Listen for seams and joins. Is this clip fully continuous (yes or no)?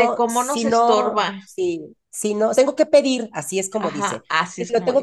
no